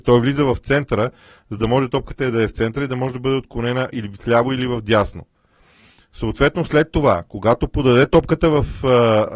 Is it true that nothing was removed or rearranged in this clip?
yes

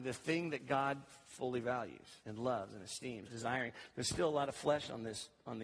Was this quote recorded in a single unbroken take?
no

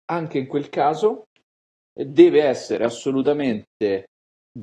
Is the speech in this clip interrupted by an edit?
no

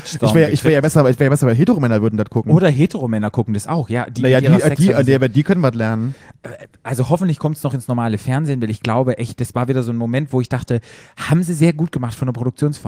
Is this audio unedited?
yes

